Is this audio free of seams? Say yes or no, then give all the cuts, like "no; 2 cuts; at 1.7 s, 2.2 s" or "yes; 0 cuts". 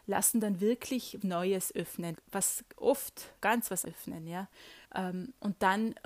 no; 5 cuts; at 1.2 s, 2.2 s, 3.4 s, 3.8 s, 4.8 s